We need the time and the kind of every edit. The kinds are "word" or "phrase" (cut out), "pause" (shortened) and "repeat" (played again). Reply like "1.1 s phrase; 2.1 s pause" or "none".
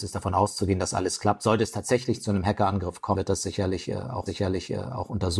3.1 s word; 4.3 s repeat